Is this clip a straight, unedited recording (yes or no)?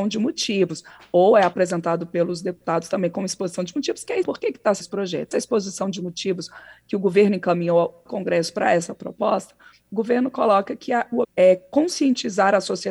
no